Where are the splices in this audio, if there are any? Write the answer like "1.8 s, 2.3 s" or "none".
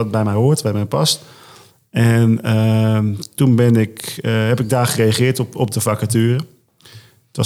none